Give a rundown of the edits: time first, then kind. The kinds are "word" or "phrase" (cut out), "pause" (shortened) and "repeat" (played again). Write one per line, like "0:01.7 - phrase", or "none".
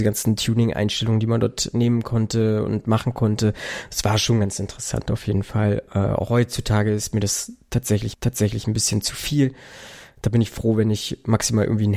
0:08.1 - repeat